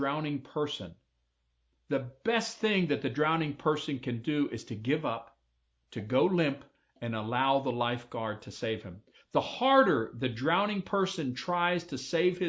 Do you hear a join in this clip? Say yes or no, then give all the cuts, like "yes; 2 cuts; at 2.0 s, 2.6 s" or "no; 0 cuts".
no; 0 cuts